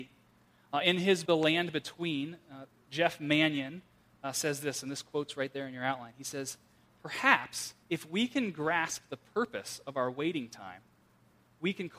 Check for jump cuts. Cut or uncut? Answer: cut